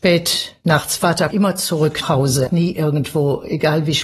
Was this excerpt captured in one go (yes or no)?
no